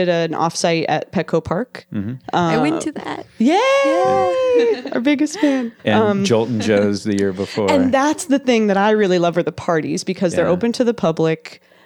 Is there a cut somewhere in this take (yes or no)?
yes